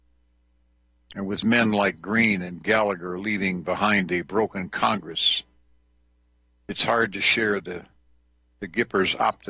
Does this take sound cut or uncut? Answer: uncut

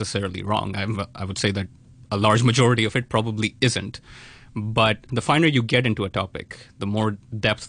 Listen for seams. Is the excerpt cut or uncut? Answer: uncut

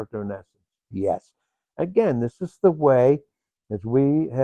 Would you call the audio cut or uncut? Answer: uncut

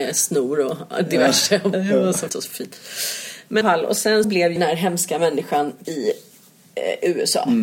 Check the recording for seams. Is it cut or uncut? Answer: cut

